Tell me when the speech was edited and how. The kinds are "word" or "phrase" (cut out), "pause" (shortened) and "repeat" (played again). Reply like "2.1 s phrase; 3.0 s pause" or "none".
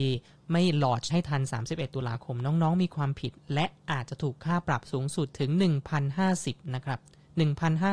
1.1 s phrase

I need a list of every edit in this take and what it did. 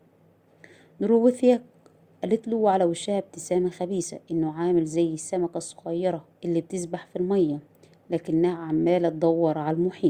6.3 s pause

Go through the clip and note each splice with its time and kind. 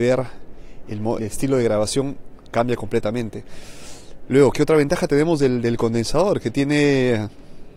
1.2 s word; 4.5 s word

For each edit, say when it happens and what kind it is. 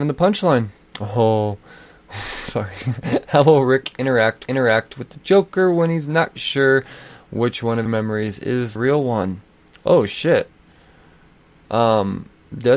4.4 s repeat; 6.4 s word; 7.9 s phrase; 8.8 s word

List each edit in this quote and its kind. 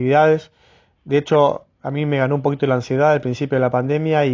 none

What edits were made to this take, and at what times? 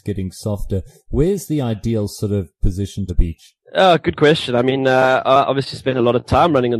3.1 s phrase; 3.6 s pause

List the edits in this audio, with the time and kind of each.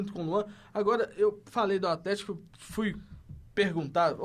none

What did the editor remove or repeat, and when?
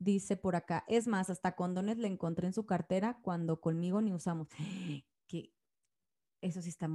none

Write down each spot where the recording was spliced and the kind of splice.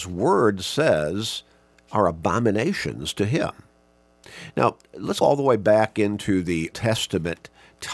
1.7 s pause; 5.2 s word; 6.7 s word

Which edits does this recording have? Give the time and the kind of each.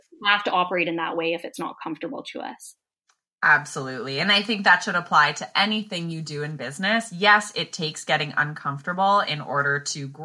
none

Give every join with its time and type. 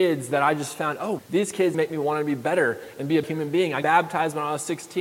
1.2 s word; 1.7 s word; 3.2 s word; 3.8 s word

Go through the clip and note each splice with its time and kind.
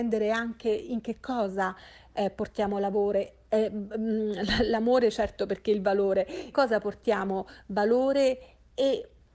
6.5 s phrase

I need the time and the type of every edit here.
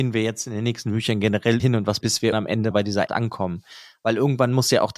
1.6 s word; 2.0 s word; 2.3 s word; 2.7 s word; 3.1 s word

